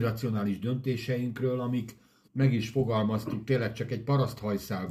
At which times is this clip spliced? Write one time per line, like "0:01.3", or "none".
0:02.2